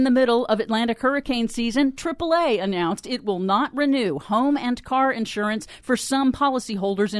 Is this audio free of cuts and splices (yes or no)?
yes